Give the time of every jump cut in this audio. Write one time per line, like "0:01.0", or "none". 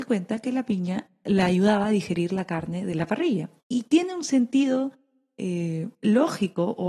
0:03.6